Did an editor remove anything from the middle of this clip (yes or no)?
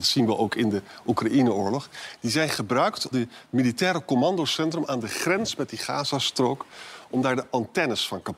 yes